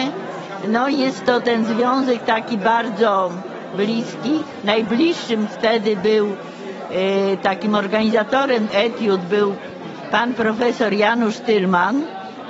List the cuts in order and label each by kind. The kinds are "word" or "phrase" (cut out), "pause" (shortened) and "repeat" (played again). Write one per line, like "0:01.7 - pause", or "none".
0:08.7 - word